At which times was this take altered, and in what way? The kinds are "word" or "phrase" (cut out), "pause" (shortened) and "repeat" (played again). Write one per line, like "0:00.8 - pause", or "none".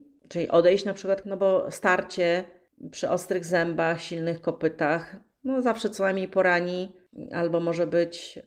0:01.2 - word